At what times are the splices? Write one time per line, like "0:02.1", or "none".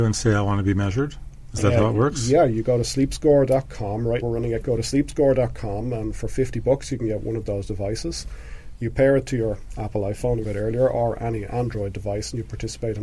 0:04.2
0:04.6
0:10.4